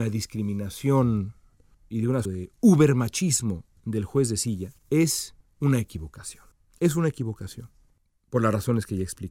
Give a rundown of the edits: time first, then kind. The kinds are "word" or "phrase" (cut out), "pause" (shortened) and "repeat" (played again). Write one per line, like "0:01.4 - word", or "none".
0:01.7 - word
0:02.2 - phrase